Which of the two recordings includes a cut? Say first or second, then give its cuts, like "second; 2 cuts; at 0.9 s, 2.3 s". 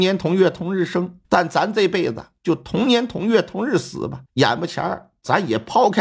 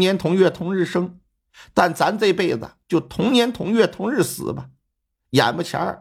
first; 2 cuts; at 1.2 s, 4.3 s